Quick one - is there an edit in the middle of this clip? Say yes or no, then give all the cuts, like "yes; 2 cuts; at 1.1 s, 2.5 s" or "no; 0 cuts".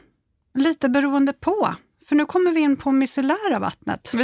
no; 0 cuts